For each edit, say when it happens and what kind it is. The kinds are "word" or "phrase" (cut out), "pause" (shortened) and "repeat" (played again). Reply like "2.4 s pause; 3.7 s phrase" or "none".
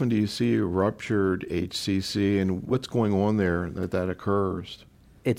none